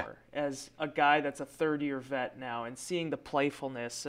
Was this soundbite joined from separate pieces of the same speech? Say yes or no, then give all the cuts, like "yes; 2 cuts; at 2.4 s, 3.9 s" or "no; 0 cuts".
no; 0 cuts